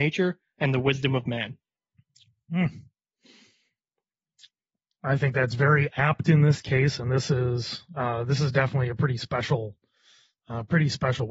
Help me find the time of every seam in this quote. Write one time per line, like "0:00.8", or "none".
none